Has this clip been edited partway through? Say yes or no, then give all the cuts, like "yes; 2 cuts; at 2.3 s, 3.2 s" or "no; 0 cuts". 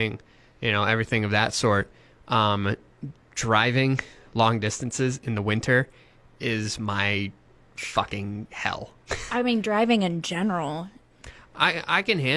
no; 0 cuts